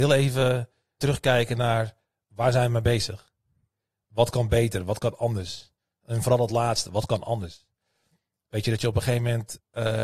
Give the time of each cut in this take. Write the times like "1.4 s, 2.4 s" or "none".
1.0 s